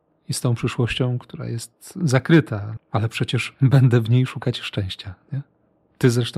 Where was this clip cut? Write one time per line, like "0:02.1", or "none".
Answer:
0:02.8